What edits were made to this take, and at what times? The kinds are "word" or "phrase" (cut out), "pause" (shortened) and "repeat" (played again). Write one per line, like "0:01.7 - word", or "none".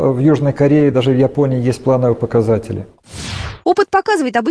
none

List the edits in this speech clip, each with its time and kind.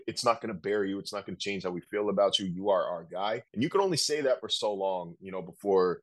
0:03.5 - pause

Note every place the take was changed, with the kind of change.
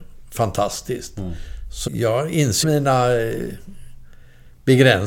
0:01.9 - word
0:02.6 - word

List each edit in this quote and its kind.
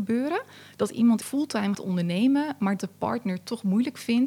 0:01.2 - word
0:01.7 - word
0:02.8 - word

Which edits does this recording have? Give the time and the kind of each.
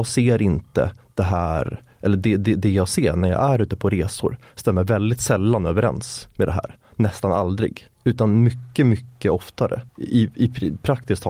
0:07.9 - pause
0:09.9 - pause

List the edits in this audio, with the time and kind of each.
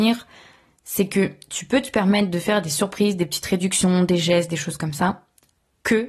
none

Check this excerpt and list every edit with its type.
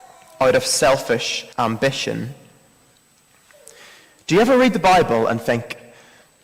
0:01.5 - pause

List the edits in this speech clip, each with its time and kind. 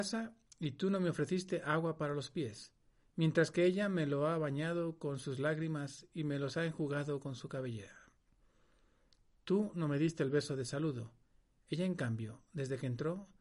none

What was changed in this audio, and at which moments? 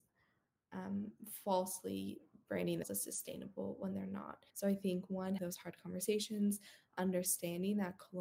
0:02.8 - word
0:04.5 - pause
0:05.4 - word

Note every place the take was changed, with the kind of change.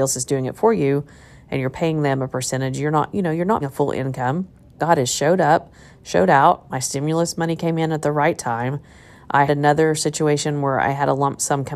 0:03.6 - word
0:04.8 - word
0:09.5 - word

